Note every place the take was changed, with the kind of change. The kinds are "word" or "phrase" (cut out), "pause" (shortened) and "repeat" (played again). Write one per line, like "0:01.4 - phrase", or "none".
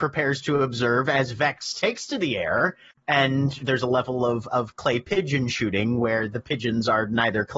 0:03.6 - word